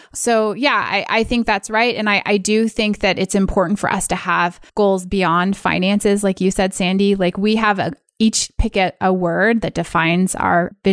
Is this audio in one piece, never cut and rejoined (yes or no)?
no